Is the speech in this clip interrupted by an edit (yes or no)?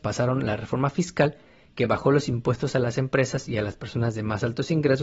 no